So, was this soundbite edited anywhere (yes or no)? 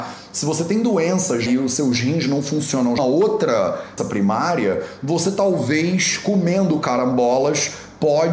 yes